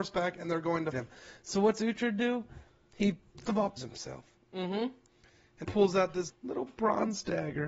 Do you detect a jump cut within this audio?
yes; 5 cuts; at 0.9 s, 3.4 s, 3.8 s, 5.6 s, 6.3 s

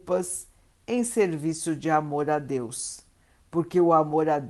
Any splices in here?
no; 0 cuts

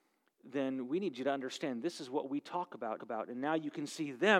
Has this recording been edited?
yes; 1 cut; at 3.0 s

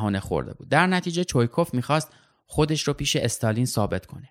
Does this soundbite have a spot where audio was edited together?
no; 0 cuts

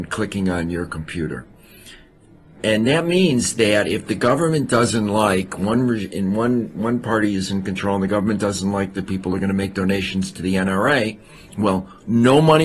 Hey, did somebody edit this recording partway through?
no; 0 cuts

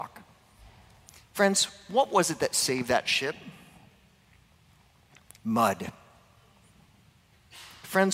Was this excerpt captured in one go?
yes; 0 cuts

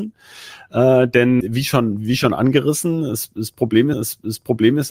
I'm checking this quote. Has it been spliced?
yes; 2 cuts; at 1.4 s, 3.9 s

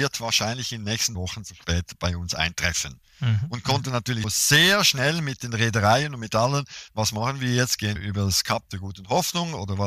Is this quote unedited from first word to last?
no; 4 cuts; at 1.1 s, 4.2 s, 6.9 s, 8.0 s

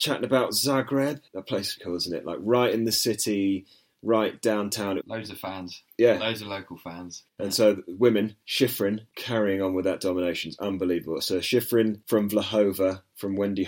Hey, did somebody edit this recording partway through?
yes; 4 cuts; at 1.3 s, 1.8 s, 5.0 s, 9.1 s

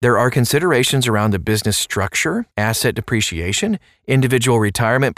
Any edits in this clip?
yes; 1 cut; at 2.5 s

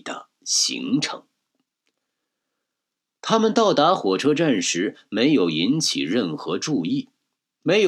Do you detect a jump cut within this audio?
no; 0 cuts

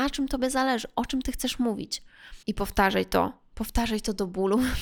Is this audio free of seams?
no; 1 cut; at 2.4 s

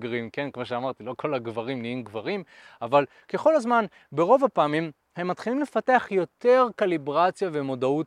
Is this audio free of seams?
yes; 0 cuts

